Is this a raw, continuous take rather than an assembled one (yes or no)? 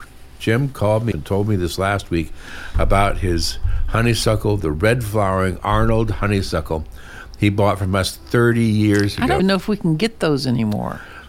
no